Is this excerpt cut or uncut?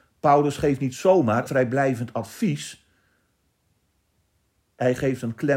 cut